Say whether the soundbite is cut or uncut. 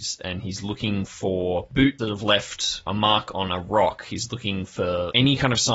cut